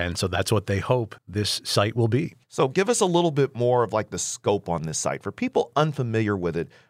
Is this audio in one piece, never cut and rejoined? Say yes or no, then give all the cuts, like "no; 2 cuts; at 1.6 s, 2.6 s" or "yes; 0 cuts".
no; 2 cuts; at 1.2 s, 2.4 s